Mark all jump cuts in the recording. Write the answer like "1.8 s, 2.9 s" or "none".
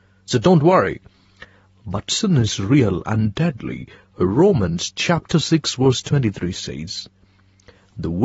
none